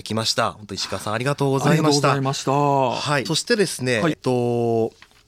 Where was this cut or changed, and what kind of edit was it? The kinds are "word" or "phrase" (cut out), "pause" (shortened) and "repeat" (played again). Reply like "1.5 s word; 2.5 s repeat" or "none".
3.3 s phrase; 4.1 s phrase